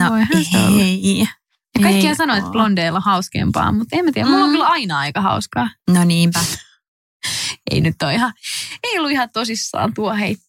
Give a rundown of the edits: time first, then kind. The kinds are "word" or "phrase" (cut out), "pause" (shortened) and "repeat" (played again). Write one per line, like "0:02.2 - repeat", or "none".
none